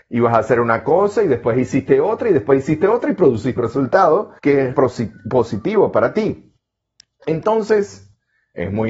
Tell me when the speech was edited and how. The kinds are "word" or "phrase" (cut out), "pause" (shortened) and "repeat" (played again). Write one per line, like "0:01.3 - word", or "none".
0:03.6 - word
0:04.4 - pause
0:04.7 - word